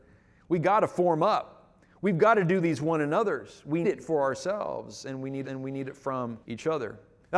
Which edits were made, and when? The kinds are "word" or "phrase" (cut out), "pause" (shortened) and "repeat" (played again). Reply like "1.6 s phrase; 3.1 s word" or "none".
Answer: 3.8 s word; 5.4 s repeat; 6.4 s pause

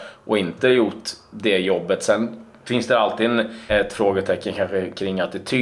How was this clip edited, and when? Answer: 3.7 s word

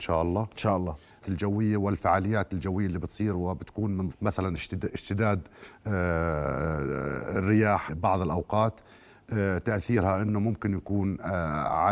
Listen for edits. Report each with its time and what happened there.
1.2 s phrase; 4.1 s word; 7.9 s word

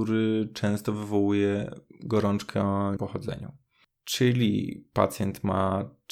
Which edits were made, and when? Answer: 3.0 s word

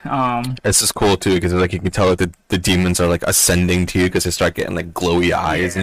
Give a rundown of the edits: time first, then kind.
none

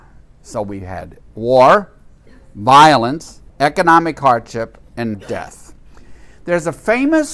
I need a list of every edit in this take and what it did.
1.3 s pause; 3.5 s pause; 5.1 s word

